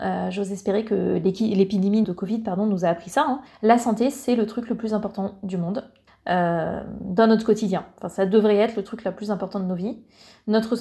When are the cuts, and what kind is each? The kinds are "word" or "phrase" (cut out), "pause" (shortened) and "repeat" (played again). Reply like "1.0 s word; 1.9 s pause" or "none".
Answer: 2.0 s word; 3.5 s pause; 6.1 s pause